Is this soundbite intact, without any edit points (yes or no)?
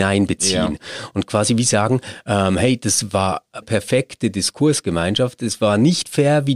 no